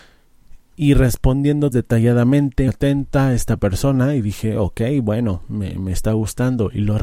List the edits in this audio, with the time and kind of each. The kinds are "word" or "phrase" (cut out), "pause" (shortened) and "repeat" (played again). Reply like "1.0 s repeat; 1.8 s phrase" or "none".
1.7 s phrase; 2.7 s word